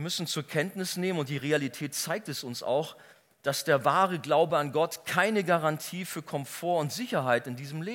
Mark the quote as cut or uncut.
uncut